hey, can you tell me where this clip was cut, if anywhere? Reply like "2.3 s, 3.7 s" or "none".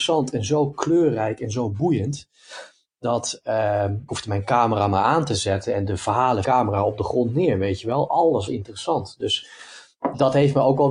4.1 s, 6.4 s, 8.5 s

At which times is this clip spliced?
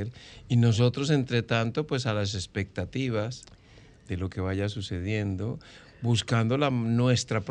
none

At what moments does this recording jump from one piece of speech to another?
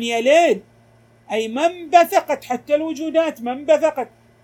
none

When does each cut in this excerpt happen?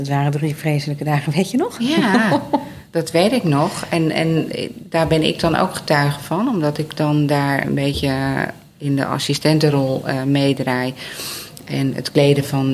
7.6 s

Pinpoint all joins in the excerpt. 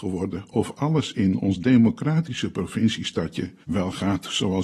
3.6 s

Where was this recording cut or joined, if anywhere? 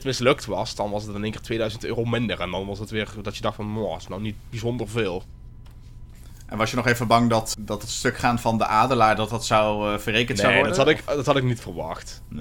7.5 s

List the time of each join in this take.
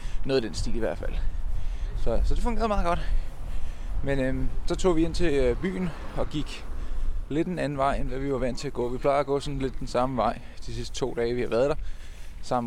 none

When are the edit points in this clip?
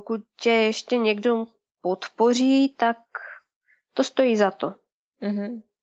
none

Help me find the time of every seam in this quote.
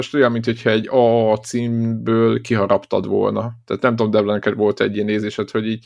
none

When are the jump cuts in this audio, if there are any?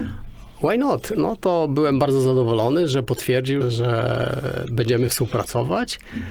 3.6 s

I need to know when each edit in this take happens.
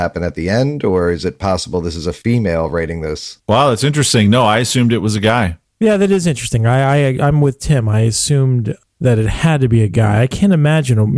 3.4 s

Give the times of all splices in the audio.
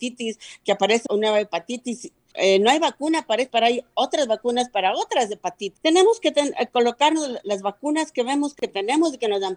1.1 s, 2.3 s, 3.5 s

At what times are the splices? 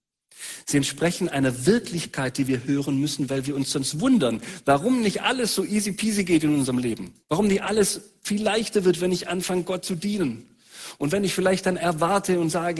7.2 s

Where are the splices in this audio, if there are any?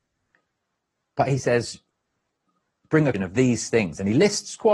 3.1 s

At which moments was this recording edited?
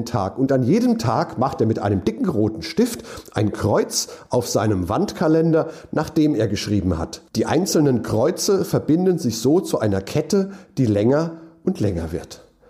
7.3 s

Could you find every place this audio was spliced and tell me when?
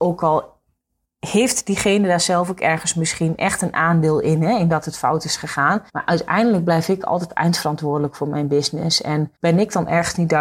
5.9 s, 9.4 s

